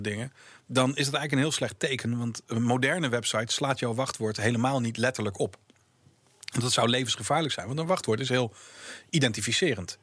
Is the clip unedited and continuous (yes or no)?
yes